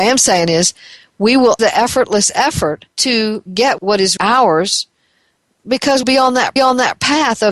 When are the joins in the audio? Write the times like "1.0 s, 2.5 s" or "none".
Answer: 1.6 s, 2.9 s, 3.8 s, 4.2 s, 6.0 s, 6.6 s